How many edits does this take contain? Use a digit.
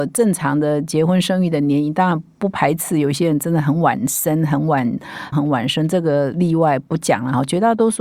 1